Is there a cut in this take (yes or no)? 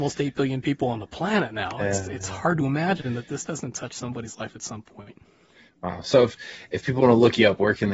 no